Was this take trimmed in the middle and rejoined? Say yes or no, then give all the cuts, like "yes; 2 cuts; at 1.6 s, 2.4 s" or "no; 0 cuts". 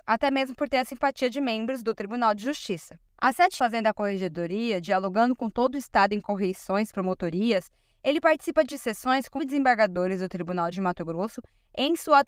yes; 4 cuts; at 3.6 s, 6.9 s, 9.4 s, 10.7 s